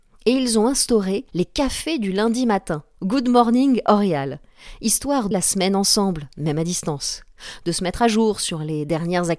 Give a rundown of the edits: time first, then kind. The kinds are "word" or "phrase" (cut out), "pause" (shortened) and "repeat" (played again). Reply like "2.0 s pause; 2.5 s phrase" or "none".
1.3 s pause; 5.3 s phrase